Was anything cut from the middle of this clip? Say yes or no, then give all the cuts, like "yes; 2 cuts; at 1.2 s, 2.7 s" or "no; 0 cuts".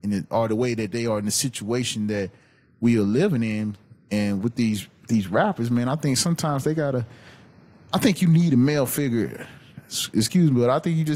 no; 0 cuts